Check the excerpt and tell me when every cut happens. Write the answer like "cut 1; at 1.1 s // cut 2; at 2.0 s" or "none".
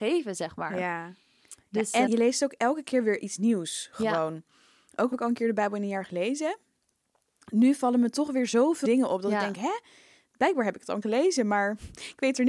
cut 1; at 2.1 s // cut 2; at 5.1 s // cut 3; at 8.8 s // cut 4; at 11.0 s